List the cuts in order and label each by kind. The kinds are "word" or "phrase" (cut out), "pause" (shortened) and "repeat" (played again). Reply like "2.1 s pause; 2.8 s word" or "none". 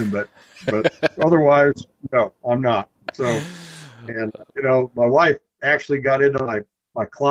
4.5 s pause